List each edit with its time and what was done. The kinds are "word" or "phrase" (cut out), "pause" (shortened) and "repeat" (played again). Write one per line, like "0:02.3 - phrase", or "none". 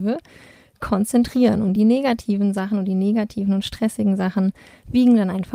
none